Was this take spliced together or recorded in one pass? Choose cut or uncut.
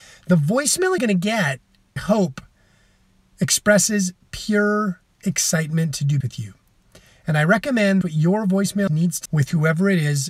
cut